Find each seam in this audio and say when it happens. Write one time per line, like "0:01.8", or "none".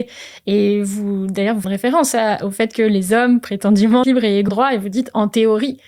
0:01.6
0:04.0
0:04.5